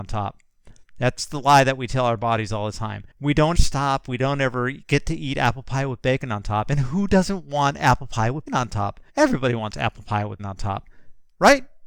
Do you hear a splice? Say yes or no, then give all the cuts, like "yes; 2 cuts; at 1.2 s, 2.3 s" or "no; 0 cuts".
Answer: yes; 5 cuts; at 3.1 s, 3.5 s, 8.5 s, 9.1 s, 10.4 s